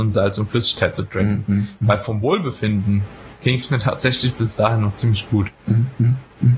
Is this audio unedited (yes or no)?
yes